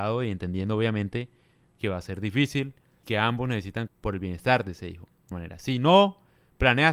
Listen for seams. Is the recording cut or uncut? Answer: cut